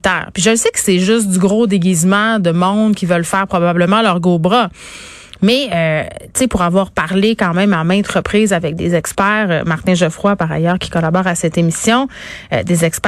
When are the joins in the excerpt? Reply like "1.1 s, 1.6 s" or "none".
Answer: none